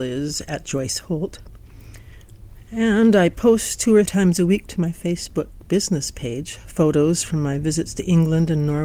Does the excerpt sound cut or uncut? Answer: cut